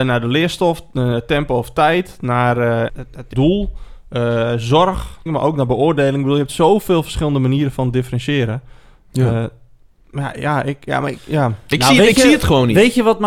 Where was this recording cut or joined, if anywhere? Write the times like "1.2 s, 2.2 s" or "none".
2.9 s, 3.3 s, 5.3 s